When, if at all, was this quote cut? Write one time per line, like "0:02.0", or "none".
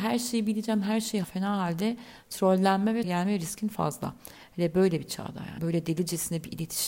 0:01.2
0:03.0
0:05.6